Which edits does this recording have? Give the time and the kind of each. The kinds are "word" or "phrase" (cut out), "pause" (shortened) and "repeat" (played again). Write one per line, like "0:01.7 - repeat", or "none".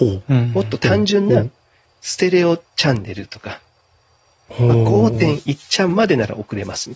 none